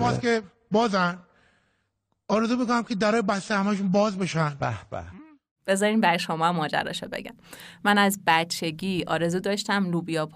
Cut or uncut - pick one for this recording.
uncut